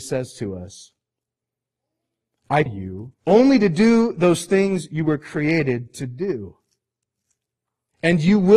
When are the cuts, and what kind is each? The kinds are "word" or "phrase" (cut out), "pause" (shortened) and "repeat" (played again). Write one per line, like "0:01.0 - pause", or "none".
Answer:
0:02.7 - word
0:03.2 - pause